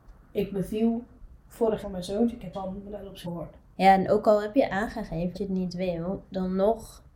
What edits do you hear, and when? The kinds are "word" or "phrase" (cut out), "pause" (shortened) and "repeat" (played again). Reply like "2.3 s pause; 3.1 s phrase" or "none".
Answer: 1.8 s word; 2.5 s word; 3.2 s word; 5.3 s word